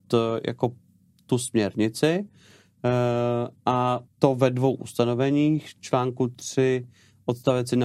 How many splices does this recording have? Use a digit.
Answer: 1